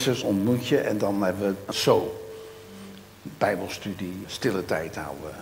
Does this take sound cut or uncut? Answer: cut